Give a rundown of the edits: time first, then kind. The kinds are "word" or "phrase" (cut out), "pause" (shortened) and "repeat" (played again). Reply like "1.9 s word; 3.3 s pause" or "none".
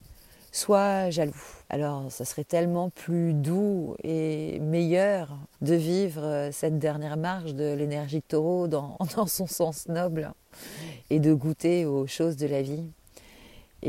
1.6 s pause; 5.5 s pause